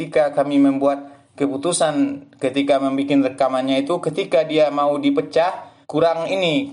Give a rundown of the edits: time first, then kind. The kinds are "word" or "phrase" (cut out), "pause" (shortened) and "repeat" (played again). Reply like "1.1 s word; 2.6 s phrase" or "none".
5.8 s pause